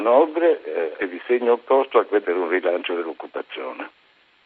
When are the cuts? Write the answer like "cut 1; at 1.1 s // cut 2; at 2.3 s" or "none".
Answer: cut 1; at 1.0 s // cut 2; at 2.2 s